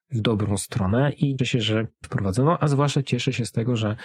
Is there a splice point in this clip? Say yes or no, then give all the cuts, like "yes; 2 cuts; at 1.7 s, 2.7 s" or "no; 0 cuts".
yes; 2 cuts; at 1.4 s, 2.0 s